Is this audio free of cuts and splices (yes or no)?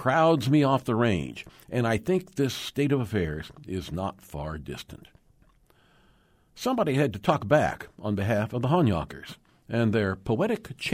yes